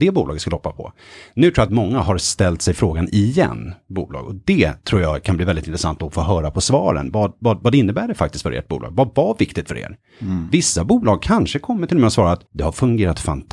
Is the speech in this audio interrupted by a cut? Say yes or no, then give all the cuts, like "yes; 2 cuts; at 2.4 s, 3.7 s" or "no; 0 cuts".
yes; 2 cuts; at 1.7 s, 12.5 s